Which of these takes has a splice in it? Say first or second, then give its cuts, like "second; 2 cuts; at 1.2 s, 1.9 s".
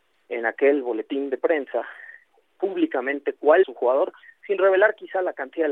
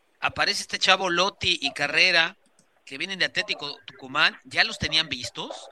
first; 1 cut; at 3.6 s